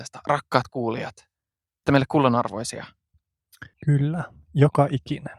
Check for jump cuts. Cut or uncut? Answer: cut